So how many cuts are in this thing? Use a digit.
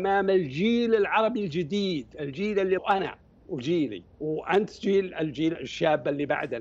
2